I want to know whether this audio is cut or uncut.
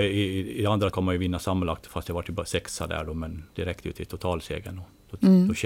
cut